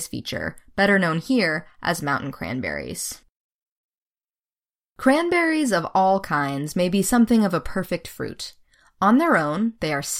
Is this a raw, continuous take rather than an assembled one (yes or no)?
yes